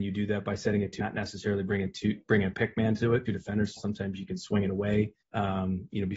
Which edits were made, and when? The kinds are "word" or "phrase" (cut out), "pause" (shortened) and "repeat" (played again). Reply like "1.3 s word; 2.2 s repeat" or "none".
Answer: 1.0 s word; 3.3 s phrase; 3.8 s phrase; 5.2 s pause